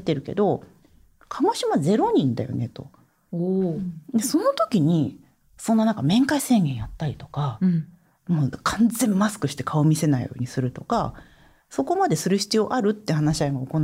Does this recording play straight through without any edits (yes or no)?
yes